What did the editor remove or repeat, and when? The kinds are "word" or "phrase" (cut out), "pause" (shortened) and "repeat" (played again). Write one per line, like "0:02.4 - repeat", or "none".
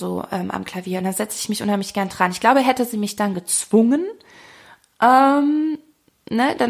none